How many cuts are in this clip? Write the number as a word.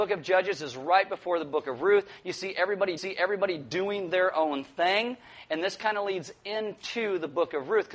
one